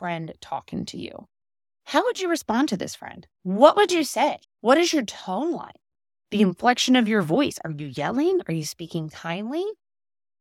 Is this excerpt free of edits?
no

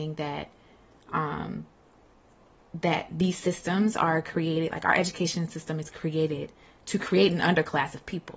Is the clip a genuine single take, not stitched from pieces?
yes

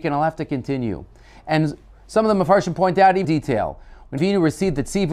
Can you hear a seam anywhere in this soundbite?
yes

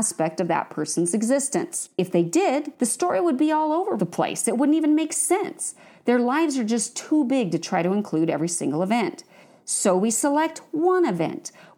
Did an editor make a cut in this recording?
no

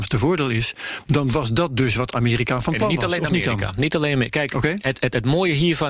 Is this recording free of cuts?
yes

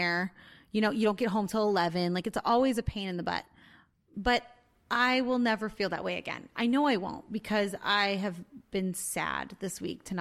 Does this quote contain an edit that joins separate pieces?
no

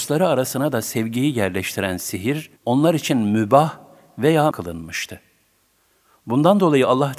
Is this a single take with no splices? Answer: no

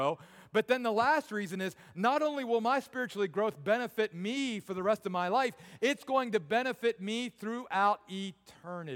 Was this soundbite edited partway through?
no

